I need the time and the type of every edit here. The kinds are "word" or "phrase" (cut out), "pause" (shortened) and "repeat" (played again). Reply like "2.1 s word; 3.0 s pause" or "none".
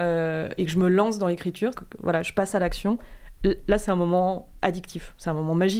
1.7 s word